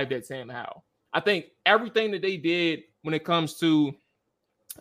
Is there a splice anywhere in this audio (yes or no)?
no